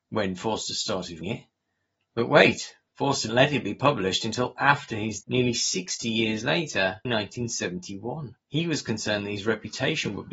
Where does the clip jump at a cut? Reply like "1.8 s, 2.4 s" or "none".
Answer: 1.2 s, 3.3 s, 5.2 s, 7.0 s, 8.4 s

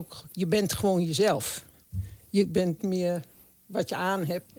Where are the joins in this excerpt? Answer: 2.8 s

